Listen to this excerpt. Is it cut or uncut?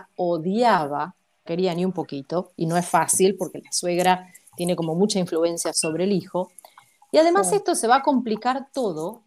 cut